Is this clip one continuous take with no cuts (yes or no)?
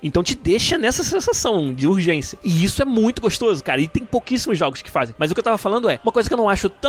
yes